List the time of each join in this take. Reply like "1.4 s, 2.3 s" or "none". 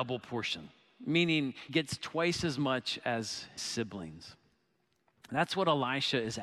1.7 s, 3.6 s